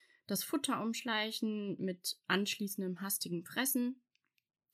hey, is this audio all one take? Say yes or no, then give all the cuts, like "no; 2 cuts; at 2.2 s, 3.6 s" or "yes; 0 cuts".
yes; 0 cuts